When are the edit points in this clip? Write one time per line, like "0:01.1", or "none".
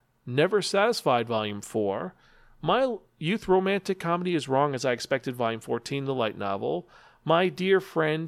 none